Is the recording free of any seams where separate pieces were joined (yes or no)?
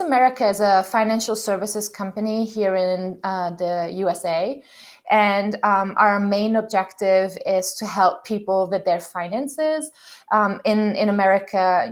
yes